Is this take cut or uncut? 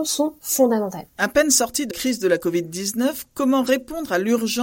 cut